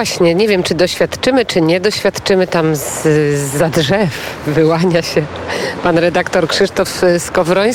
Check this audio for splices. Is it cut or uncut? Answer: uncut